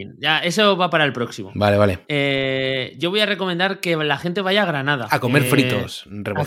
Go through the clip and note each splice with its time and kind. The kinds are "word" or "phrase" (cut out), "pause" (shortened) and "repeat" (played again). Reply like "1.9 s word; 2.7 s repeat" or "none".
none